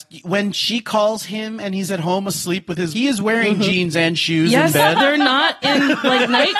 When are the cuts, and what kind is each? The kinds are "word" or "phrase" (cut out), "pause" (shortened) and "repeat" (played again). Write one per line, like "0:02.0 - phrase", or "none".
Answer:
0:02.9 - word